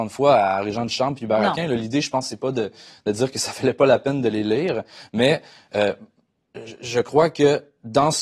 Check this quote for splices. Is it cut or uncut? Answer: uncut